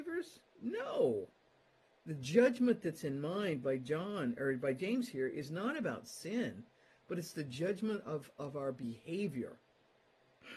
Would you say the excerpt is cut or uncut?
uncut